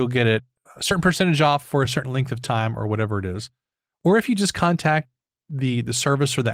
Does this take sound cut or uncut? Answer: uncut